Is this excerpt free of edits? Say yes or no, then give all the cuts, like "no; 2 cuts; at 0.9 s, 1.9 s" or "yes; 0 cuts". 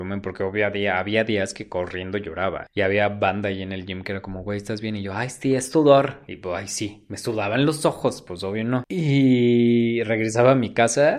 yes; 0 cuts